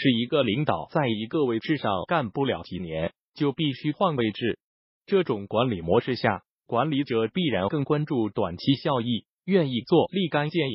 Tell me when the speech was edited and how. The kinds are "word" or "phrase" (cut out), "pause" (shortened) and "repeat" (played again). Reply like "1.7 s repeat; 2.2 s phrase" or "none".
none

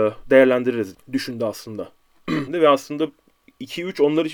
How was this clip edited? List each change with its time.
0.9 s word; 2.5 s phrase

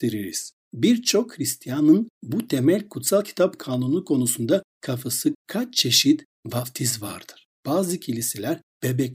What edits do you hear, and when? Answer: 5.3 s word

